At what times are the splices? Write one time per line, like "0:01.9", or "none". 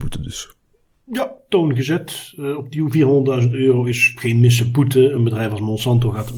none